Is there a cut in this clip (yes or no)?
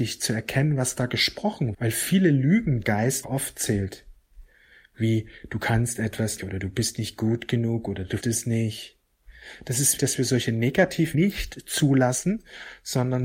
yes